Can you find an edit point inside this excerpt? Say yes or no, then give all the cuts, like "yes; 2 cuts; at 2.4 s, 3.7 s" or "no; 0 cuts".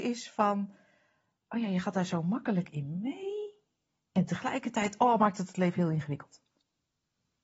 no; 0 cuts